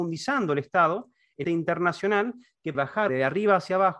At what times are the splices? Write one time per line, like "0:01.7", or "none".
0:01.4
0:02.7
0:03.1